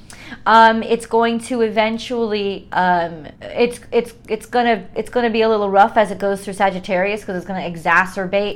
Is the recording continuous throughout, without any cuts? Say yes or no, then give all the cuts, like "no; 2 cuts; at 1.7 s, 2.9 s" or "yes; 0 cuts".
no; 1 cut; at 3.4 s